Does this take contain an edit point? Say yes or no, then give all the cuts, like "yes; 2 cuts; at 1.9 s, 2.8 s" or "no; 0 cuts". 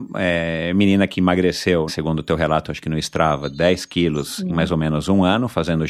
yes; 1 cut; at 1.9 s